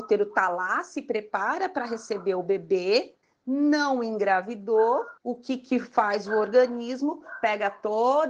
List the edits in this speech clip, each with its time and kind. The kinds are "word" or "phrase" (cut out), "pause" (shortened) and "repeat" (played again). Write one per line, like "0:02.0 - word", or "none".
0:03.2 - pause
0:05.2 - pause